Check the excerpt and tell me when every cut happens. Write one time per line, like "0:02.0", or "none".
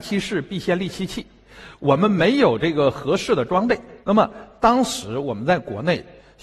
0:04.0